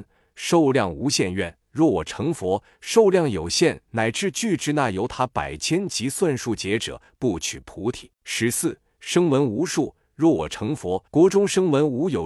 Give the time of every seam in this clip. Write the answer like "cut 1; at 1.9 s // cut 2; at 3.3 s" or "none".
cut 1; at 1.6 s // cut 2; at 8.1 s // cut 3; at 11.1 s